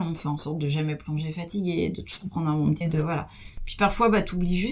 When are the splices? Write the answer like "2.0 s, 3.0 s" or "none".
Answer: 2.8 s